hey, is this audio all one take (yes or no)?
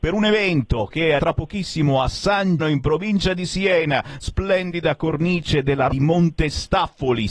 no